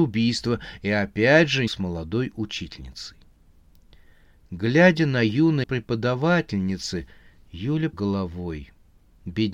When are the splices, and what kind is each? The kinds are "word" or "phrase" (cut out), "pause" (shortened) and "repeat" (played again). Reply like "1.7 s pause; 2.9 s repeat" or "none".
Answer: 1.7 s word; 5.6 s word; 7.9 s word